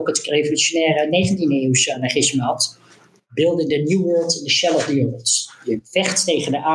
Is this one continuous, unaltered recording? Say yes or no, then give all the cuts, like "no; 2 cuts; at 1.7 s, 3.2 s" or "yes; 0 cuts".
yes; 0 cuts